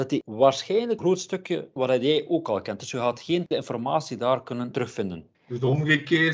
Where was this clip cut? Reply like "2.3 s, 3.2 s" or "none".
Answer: 1.0 s, 1.8 s, 3.5 s, 5.3 s